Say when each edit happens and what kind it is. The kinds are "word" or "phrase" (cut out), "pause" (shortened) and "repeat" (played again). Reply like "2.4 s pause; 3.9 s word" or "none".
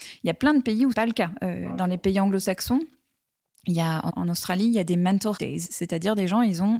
0.9 s word; 4.1 s word; 5.4 s word

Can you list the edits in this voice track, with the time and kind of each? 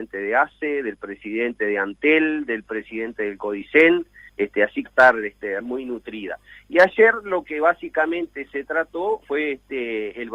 4.3 s pause; 4.9 s phrase; 5.6 s word; 9.2 s word

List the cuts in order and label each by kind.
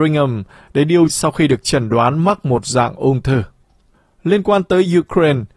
1.1 s word

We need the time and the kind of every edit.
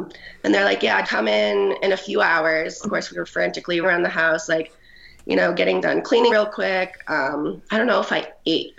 1.0 s word; 2.8 s word; 3.8 s word; 5.8 s word; 6.3 s word; 7.7 s word

